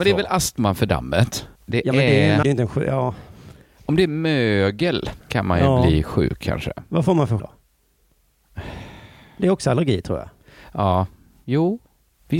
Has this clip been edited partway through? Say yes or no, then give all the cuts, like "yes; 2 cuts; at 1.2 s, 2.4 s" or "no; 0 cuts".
yes; 4 cuts; at 1.5 s, 2.4 s, 5.2 s, 7.4 s